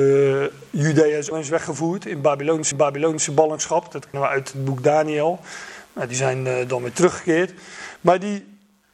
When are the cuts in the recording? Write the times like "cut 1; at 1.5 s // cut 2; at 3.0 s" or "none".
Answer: cut 1; at 1.3 s // cut 2; at 2.7 s // cut 3; at 4.1 s